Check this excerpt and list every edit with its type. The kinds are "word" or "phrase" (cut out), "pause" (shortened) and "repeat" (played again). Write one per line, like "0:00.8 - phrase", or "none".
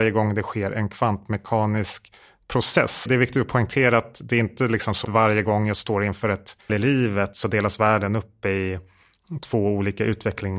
0:03.1 - word
0:05.0 - word
0:06.7 - word

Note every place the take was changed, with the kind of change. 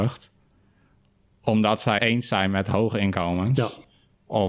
0:02.0 - word

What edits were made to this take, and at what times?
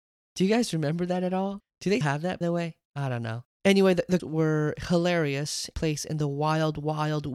0:01.7 - pause
0:02.0 - word
0:02.4 - word
0:02.9 - pause
0:03.5 - pause
0:04.2 - word
0:05.7 - phrase

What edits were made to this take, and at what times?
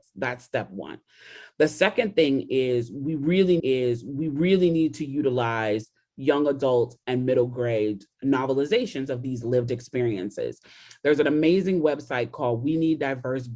0:03.6 - repeat
0:08.2 - word

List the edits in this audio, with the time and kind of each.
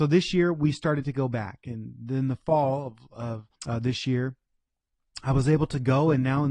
0:03.6 - pause

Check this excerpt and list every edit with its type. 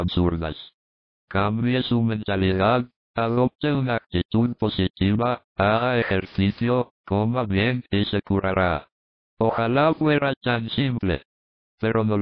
none

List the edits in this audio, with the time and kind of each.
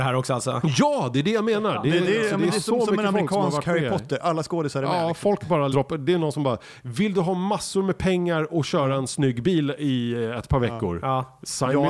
0:05.7 - word

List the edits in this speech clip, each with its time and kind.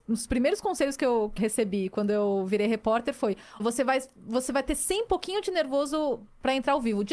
0:01.4 - word
0:03.6 - word
0:05.1 - word

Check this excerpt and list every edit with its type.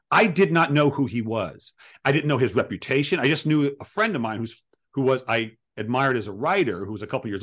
none

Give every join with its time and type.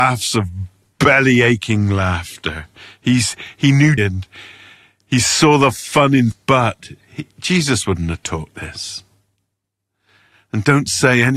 0:04.0 - word
0:06.3 - word
0:08.5 - word

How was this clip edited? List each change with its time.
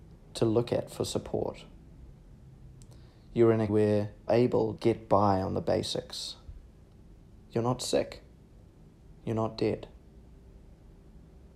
0:03.7 - word
0:04.3 - word
0:04.8 - word
0:09.2 - pause

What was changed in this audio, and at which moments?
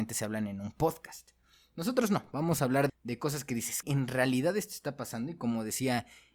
0:02.9 - word
0:03.8 - word

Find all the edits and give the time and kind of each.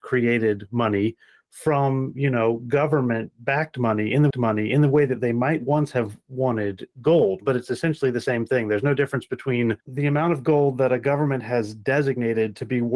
0:04.3 - repeat
0:09.8 - pause

